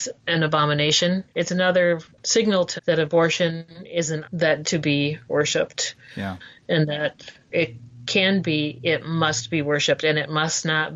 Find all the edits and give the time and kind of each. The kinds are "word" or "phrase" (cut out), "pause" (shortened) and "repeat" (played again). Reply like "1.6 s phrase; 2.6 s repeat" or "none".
1.3 s word; 2.8 s word; 4.2 s word; 4.6 s word; 7.5 s word